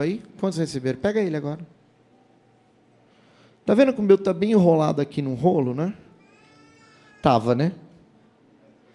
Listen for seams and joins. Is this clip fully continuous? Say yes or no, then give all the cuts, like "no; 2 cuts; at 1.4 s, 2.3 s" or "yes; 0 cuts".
yes; 0 cuts